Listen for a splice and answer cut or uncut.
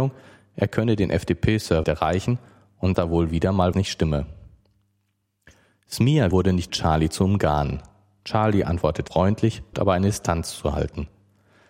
cut